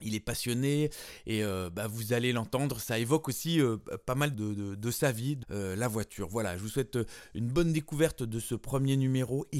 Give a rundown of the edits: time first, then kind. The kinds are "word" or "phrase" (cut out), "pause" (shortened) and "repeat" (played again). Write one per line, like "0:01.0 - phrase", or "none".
0:04.3 - phrase
0:05.4 - phrase